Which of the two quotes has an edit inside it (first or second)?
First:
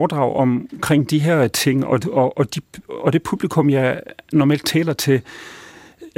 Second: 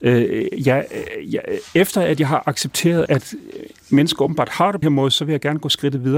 second